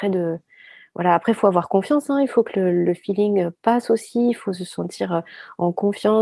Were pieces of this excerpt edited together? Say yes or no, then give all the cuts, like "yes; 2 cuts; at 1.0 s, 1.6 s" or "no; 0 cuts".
no; 0 cuts